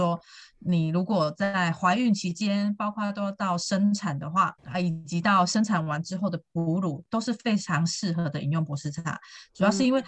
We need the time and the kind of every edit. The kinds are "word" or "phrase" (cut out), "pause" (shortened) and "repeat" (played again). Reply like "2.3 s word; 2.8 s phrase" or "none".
4.6 s pause